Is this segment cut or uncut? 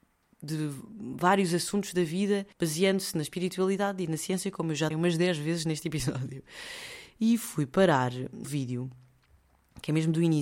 cut